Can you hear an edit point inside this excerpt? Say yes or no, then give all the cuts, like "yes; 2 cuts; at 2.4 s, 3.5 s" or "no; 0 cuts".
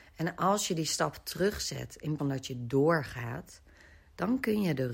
yes; 1 cut; at 2.2 s